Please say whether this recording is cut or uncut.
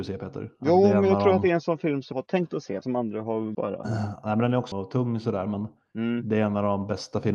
cut